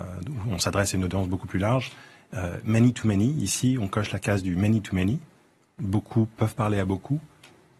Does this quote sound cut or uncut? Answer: uncut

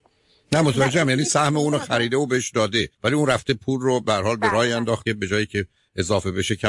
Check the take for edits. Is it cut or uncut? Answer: cut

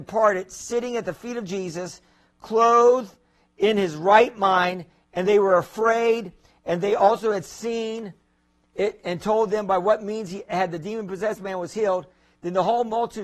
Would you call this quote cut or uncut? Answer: uncut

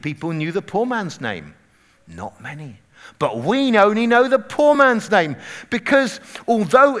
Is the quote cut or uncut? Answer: uncut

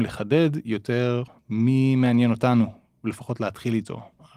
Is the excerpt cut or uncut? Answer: uncut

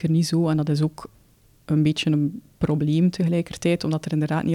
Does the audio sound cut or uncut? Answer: uncut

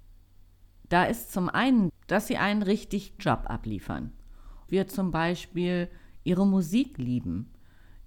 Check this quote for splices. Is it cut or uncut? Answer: cut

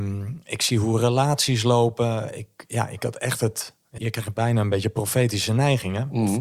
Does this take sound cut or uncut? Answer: cut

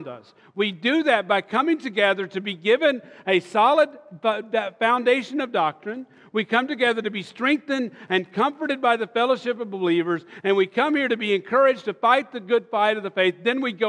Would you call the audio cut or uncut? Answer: uncut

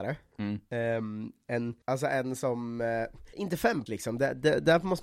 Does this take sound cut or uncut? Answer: cut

